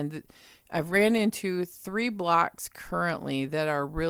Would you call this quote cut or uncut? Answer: uncut